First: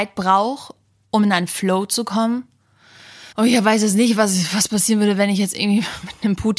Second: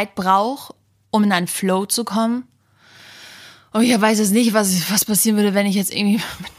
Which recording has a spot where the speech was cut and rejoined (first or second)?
first